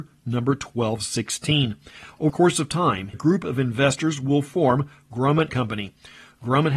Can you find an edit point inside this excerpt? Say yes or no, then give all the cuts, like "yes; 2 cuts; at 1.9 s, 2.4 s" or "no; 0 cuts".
yes; 3 cuts; at 2.3 s, 3.1 s, 5.5 s